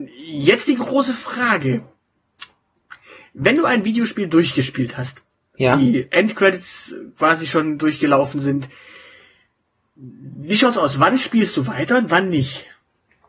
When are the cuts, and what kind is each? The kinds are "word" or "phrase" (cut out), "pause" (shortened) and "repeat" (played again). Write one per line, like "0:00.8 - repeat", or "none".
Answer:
none